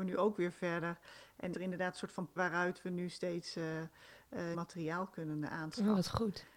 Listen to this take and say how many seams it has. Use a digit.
3